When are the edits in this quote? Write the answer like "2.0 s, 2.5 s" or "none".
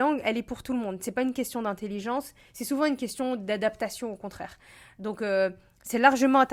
none